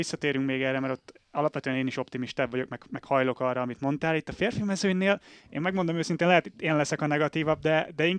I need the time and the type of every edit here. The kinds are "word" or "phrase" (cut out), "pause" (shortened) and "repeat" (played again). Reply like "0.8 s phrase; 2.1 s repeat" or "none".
none